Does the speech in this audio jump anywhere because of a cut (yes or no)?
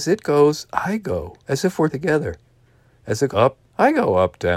yes